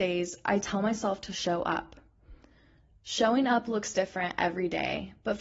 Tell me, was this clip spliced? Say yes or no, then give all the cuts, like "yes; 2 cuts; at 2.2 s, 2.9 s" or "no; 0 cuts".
no; 0 cuts